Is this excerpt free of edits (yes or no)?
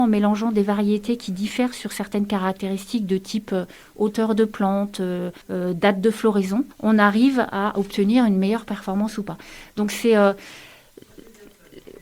no